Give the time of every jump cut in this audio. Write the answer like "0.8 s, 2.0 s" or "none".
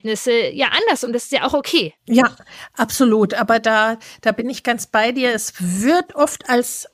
2.0 s